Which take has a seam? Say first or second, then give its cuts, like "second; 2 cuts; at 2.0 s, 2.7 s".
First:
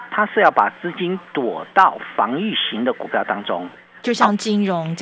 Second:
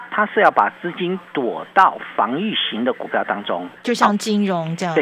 second; 1 cut; at 3.8 s